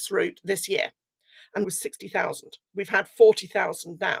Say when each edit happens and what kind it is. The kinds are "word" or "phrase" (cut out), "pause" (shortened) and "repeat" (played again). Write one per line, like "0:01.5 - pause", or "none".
0:01.6 - phrase
0:02.6 - pause